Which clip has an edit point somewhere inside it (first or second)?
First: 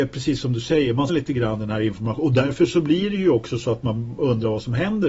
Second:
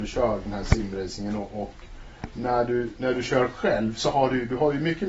first